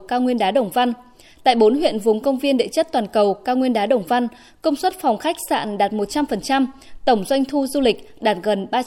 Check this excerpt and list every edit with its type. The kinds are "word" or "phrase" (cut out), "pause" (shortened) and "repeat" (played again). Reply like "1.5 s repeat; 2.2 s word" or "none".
none